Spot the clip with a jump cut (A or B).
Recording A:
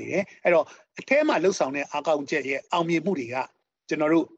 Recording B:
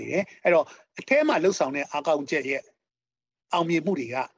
A